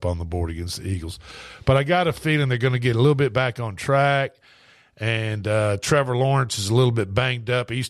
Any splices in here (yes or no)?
no